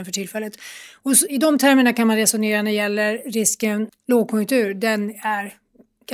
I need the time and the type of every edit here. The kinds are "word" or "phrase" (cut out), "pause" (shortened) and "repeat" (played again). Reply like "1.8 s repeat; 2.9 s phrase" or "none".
1.3 s word; 3.9 s word